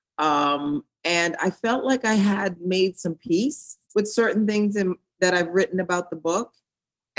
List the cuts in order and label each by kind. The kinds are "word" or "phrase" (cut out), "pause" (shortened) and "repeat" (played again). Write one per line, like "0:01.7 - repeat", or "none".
0:03.8 - pause